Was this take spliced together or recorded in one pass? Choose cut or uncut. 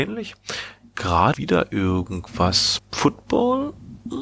cut